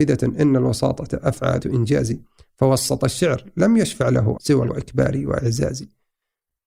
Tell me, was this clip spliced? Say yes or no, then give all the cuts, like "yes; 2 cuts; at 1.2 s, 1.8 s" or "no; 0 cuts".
yes; 3 cuts; at 1.6 s, 4.4 s, 4.7 s